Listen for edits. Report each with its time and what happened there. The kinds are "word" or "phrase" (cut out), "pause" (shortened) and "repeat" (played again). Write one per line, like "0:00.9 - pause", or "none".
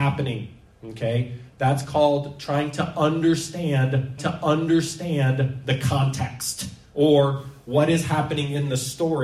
0:04.2 - repeat